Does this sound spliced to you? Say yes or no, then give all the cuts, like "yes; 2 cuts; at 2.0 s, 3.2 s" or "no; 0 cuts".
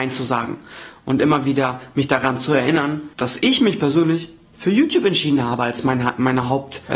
no; 0 cuts